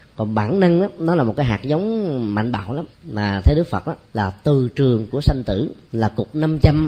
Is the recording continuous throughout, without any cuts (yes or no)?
no